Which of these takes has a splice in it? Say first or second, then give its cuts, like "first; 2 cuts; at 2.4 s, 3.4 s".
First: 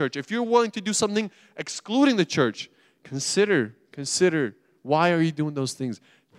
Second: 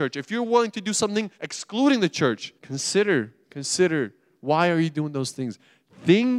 second; 2 cuts; at 1.3 s, 2.6 s